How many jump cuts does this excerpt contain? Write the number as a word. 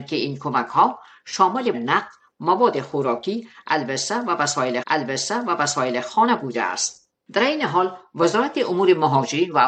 two